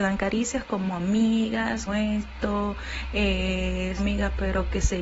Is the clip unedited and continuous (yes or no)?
no